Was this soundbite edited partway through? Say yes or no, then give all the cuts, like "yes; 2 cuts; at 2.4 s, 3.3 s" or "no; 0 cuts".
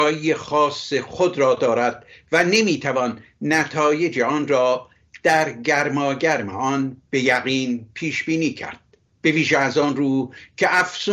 no; 0 cuts